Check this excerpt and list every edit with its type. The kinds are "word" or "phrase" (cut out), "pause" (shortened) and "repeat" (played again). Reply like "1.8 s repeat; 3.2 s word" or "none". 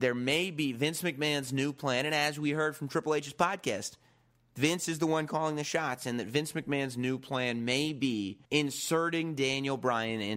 8.5 s pause